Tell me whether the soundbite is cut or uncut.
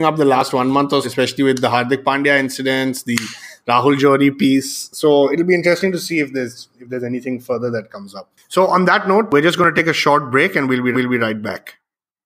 cut